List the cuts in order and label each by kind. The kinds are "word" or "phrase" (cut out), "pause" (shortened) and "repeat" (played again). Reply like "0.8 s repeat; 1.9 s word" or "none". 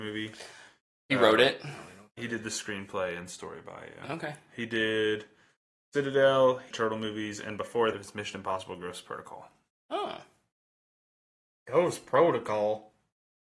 6.7 s phrase; 7.9 s word